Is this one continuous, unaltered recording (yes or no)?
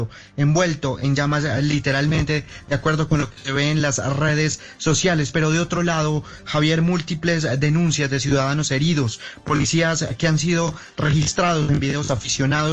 yes